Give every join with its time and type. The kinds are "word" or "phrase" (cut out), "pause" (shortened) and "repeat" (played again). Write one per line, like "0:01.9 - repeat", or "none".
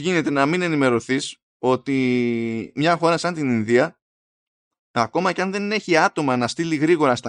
none